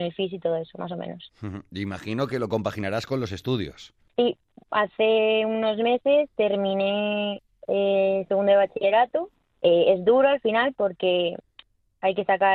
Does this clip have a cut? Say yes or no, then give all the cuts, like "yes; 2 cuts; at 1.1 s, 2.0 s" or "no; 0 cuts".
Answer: no; 0 cuts